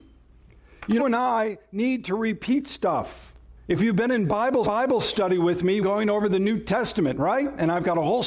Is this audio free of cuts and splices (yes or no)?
no